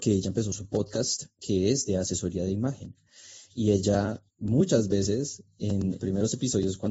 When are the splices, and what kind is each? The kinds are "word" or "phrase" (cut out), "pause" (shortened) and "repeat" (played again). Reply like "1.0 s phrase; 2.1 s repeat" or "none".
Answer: 4.3 s pause; 6.0 s word